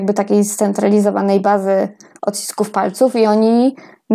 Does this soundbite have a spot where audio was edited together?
no; 0 cuts

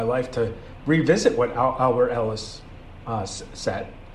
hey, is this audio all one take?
yes; 0 cuts

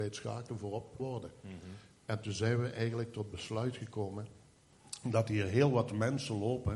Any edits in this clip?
yes; 1 cut; at 1.0 s

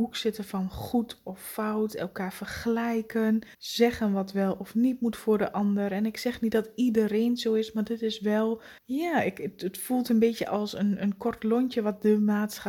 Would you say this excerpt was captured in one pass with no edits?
no; 2 cuts; at 3.5 s, 8.8 s

